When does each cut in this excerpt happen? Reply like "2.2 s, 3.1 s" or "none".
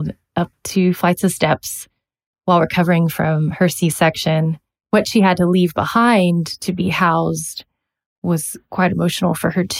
none

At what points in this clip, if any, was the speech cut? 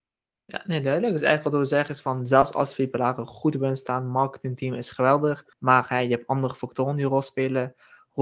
5.5 s

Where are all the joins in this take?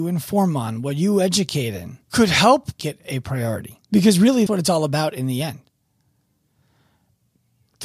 2.0 s, 2.8 s, 3.8 s, 4.5 s

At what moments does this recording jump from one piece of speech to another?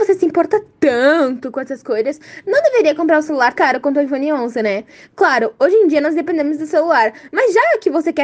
3.6 s

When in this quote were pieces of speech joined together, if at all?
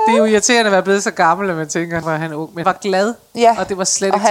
2.0 s, 2.6 s

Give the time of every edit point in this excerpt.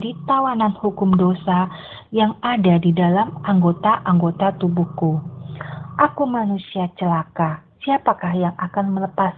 7.7 s

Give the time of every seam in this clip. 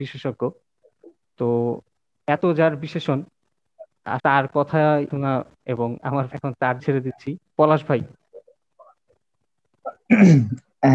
2.4 s, 4.2 s, 5.1 s, 5.5 s, 6.0 s, 6.3 s, 6.8 s, 7.5 s

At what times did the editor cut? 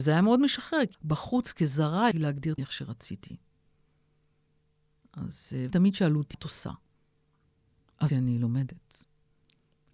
0.9 s, 2.1 s, 2.6 s, 5.7 s, 6.3 s, 8.1 s

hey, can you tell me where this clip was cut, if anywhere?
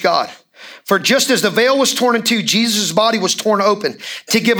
none

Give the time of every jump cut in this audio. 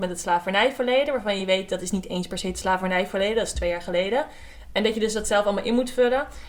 none

